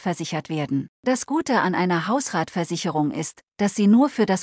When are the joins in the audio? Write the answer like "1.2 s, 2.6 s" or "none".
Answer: 0.9 s